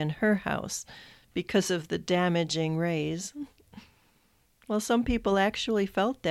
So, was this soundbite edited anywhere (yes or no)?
no